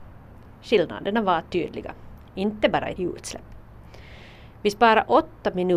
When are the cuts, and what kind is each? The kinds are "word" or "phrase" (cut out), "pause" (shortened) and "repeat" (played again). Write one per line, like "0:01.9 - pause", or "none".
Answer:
0:03.0 - phrase